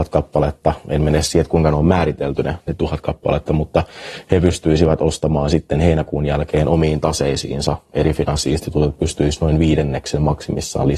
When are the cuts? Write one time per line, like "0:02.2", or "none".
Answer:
none